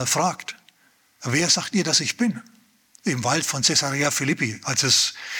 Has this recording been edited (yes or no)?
no